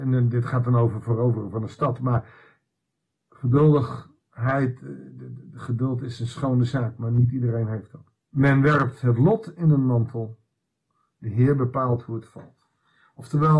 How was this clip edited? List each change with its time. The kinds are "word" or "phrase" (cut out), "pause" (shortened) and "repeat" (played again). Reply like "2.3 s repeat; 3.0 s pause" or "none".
8.2 s pause